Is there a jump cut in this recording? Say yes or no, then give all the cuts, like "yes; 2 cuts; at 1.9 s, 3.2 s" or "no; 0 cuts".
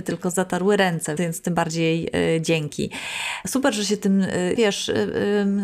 yes; 2 cuts; at 1.2 s, 4.6 s